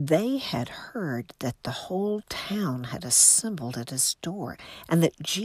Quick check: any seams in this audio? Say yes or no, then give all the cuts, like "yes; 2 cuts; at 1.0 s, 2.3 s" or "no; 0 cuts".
no; 0 cuts